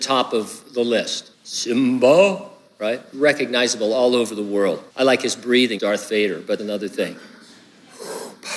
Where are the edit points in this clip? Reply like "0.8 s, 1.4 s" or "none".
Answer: 1.3 s, 3.1 s, 4.9 s, 5.8 s, 6.6 s